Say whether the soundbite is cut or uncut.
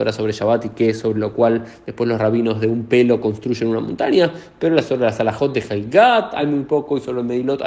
uncut